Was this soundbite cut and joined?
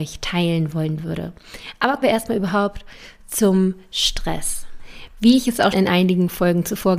yes; 2 cuts; at 2.0 s, 5.7 s

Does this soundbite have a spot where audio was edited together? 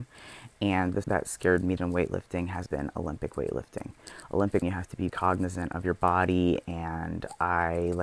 yes; 5 cuts; at 1.0 s, 1.8 s, 2.7 s, 4.6 s, 5.1 s

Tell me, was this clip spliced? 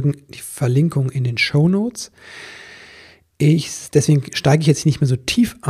no; 0 cuts

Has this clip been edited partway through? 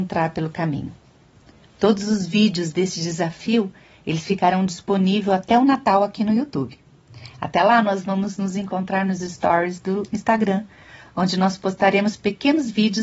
no; 0 cuts

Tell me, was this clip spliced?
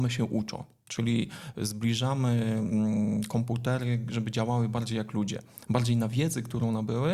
no; 0 cuts

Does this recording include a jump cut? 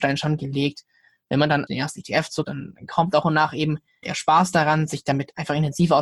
yes; 4 cuts; at 1.7 s, 2.4 s, 3.2 s, 4.0 s

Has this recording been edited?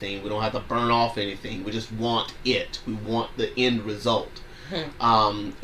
no; 0 cuts

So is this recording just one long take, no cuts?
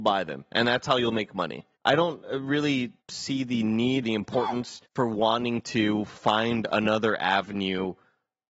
no; 4 cuts; at 1.7 s, 3.0 s, 4.0 s, 4.9 s

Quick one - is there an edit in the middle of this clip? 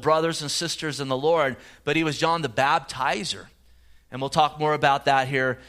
no; 0 cuts

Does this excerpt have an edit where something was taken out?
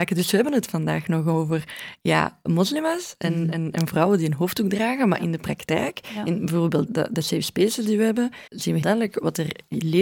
yes; 4 cuts; at 2.4 s, 6.9 s, 8.5 s, 8.8 s

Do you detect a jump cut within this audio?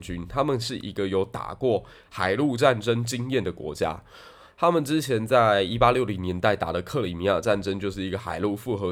no; 0 cuts

